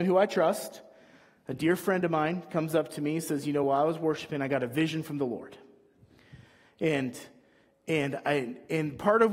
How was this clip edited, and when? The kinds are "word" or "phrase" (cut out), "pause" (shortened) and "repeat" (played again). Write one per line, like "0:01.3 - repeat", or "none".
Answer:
none